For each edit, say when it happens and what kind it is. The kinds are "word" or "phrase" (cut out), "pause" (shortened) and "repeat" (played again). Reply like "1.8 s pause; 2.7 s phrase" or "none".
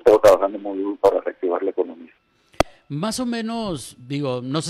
none

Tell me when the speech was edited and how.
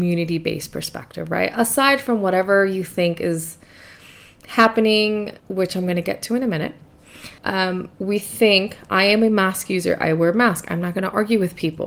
5.4 s pause; 7.4 s pause

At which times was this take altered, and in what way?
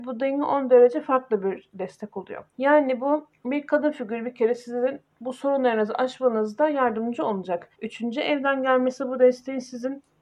2.5 s pause; 3.3 s pause; 5.1 s pause; 7.7 s pause

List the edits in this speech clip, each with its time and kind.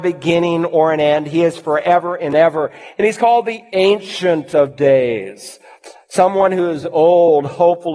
none

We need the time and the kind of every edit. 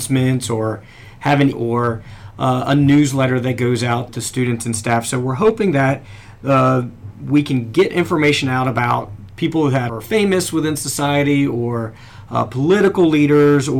1.5 s phrase; 4.1 s word; 9.3 s word; 9.9 s word

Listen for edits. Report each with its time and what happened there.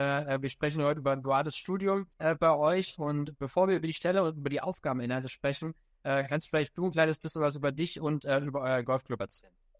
2.1 s pause

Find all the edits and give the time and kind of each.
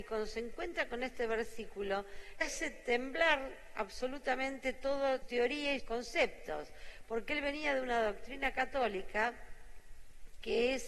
2.4 s word; 5.2 s word; 5.8 s word

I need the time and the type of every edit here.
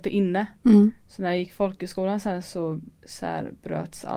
2.9 s pause

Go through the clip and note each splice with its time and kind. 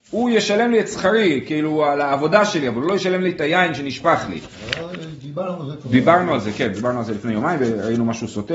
none

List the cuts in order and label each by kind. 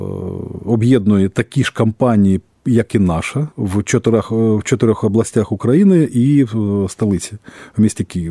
3.5 s pause

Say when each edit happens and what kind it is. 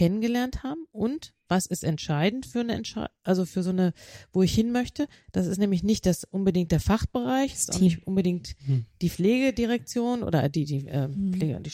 none

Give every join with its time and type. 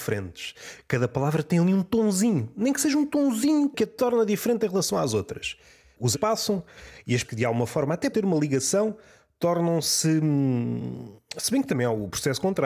6.1 s word; 7.2 s word; 8.1 s word

